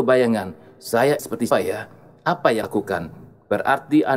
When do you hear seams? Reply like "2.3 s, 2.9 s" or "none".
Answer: 1.2 s, 1.5 s, 2.6 s